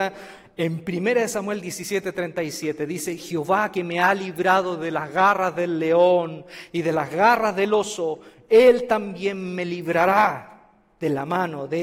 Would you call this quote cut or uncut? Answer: uncut